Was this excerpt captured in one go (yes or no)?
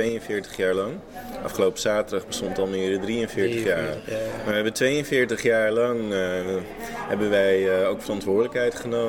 yes